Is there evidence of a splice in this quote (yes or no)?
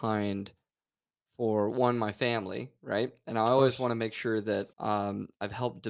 yes